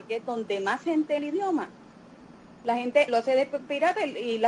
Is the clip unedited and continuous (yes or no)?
no